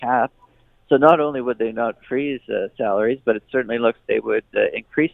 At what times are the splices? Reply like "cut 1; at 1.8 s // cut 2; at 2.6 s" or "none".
cut 1; at 4.0 s